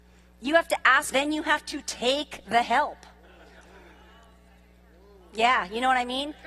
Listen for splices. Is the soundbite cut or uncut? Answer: cut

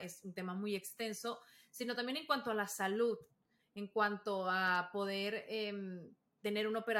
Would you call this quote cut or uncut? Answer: uncut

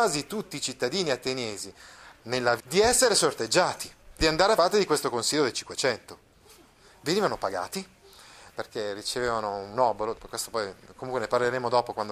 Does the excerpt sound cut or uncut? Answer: cut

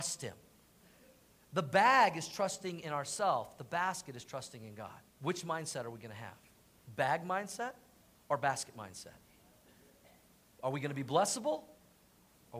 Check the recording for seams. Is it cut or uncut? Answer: cut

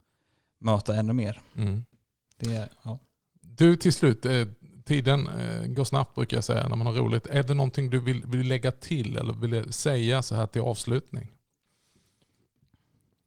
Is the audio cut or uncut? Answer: uncut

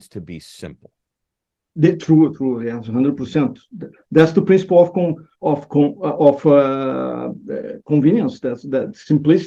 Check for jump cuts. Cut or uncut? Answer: cut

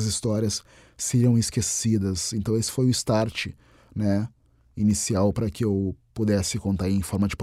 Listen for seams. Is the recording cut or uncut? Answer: uncut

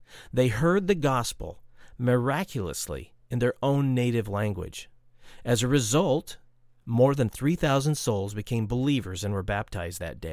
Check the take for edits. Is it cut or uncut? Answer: uncut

